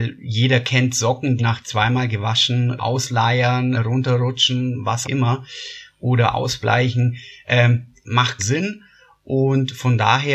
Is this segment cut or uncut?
cut